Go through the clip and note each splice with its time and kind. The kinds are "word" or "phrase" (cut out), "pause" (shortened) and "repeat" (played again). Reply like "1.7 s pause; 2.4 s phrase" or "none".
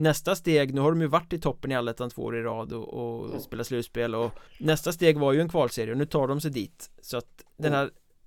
4.5 s pause